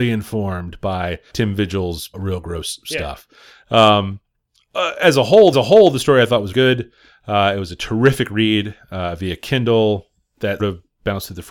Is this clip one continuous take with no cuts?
no; 5 cuts; at 1.3 s, 2.1 s, 5.5 s, 6.5 s, 10.6 s

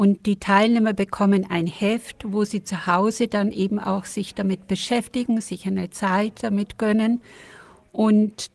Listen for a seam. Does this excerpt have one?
no; 0 cuts

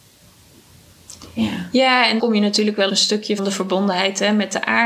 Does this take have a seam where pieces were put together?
yes; 3 cuts; at 2.2 s, 2.9 s, 3.4 s

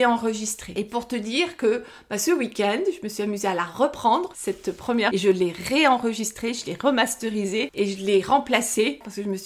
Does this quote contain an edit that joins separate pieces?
yes; 2 cuts; at 4.3 s, 5.1 s

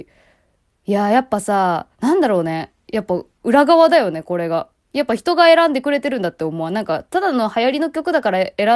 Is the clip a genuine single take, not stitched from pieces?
no; 1 cut; at 1.9 s

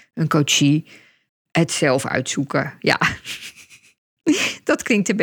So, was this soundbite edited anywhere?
no; 0 cuts

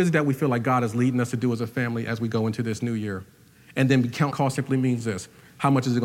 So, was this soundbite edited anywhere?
yes; 1 cut; at 4.3 s

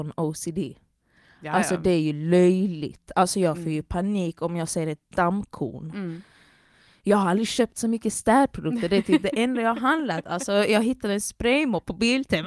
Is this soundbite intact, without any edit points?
yes; 0 cuts

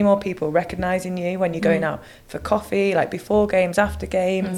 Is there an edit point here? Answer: no; 0 cuts

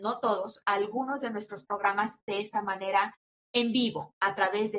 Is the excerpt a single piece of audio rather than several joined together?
yes; 0 cuts

